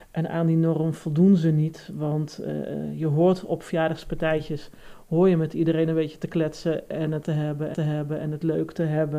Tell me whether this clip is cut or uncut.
cut